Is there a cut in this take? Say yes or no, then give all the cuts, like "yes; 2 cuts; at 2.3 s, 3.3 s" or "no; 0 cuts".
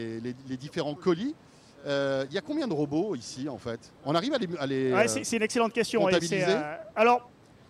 no; 0 cuts